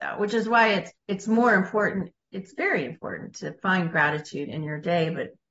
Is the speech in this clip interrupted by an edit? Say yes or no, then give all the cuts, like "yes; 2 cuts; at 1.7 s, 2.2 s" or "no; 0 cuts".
yes; 1 cut; at 1.0 s